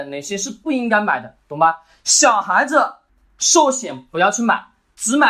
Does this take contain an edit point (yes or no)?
yes